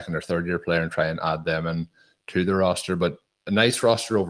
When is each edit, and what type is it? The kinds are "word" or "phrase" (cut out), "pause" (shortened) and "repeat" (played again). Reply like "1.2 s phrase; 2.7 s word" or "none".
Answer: none

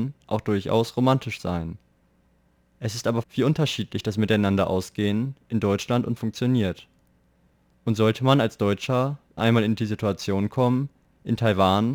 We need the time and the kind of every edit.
3.2 s word; 6.2 s word; 9.4 s word

